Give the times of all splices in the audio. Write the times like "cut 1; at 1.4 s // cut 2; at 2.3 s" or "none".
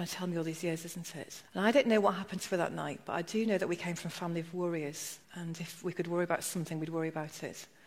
cut 1; at 1.5 s // cut 2; at 5.2 s